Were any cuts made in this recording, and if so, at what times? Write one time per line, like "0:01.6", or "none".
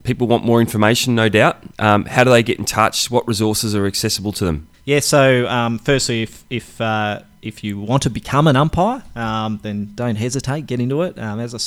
0:01.7
0:04.7